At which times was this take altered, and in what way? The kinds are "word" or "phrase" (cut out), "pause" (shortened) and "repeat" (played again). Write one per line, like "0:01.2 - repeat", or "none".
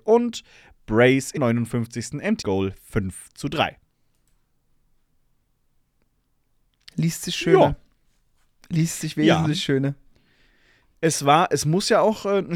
0:01.4 - word
0:02.4 - word

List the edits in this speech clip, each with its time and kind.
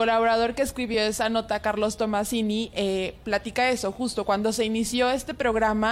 none

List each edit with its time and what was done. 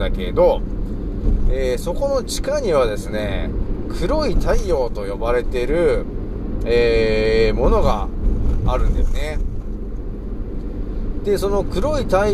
none

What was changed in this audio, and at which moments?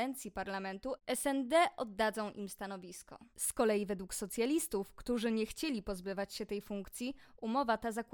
0:03.3 - pause

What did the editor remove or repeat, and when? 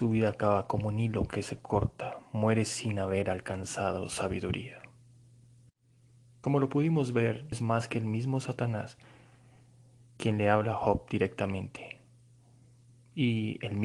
0:07.5 - word

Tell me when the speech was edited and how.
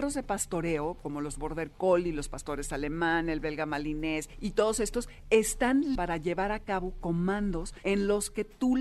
0:06.0 - word

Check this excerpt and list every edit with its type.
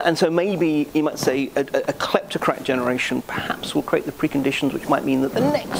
none

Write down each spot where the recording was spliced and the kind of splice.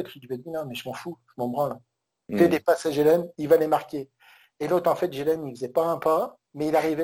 none

